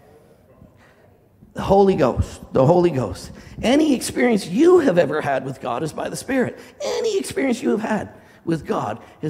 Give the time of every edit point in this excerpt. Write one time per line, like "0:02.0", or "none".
none